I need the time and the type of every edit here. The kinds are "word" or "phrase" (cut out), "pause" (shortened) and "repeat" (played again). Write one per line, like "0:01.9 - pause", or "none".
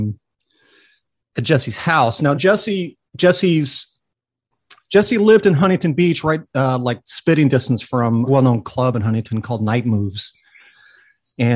0:02.3 - word
0:03.1 - pause
0:08.3 - phrase